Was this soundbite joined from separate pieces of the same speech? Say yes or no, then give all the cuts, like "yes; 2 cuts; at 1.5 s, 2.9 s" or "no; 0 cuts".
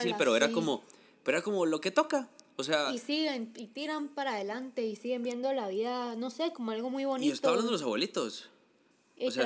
no; 0 cuts